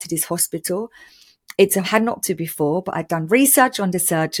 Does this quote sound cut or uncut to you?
cut